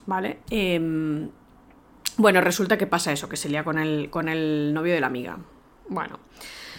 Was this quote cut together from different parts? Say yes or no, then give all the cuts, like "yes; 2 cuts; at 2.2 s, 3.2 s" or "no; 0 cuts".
no; 0 cuts